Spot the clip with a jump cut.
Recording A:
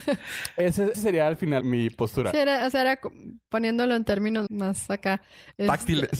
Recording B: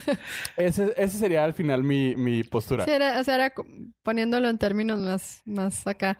A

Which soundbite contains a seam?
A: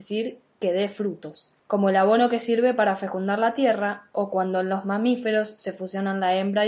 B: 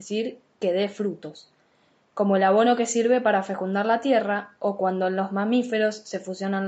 A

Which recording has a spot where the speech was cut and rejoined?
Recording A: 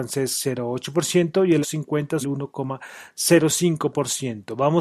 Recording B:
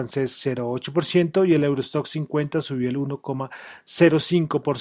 A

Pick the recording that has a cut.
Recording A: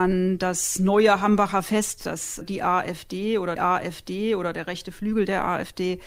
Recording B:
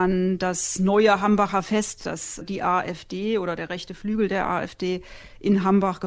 A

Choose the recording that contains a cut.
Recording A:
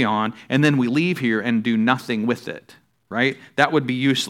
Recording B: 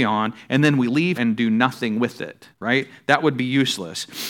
B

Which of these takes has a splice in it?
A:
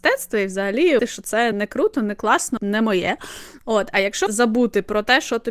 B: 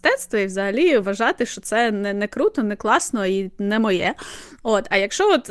A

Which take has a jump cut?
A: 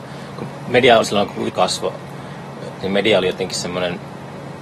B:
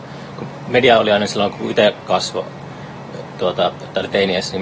A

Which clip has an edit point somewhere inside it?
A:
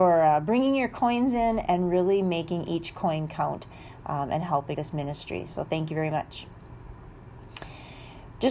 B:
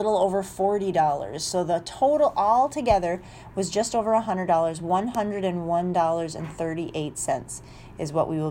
A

